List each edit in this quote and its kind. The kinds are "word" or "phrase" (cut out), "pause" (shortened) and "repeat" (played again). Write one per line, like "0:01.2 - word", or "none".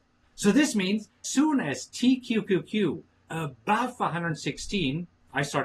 0:01.2 - word
0:03.2 - word